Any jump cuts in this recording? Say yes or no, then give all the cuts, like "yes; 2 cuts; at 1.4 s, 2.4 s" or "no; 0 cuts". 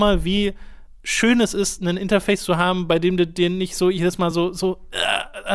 no; 0 cuts